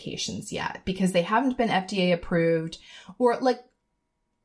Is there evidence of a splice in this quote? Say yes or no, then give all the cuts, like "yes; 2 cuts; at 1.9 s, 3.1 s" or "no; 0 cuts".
no; 0 cuts